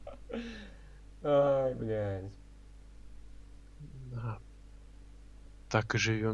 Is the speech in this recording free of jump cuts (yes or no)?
yes